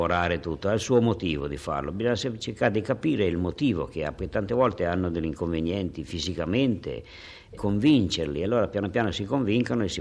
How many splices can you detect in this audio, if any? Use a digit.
1